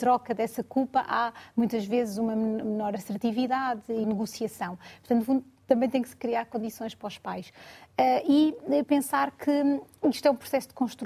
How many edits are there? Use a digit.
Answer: 1